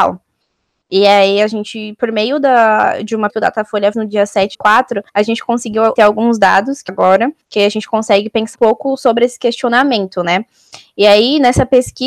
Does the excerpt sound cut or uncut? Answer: cut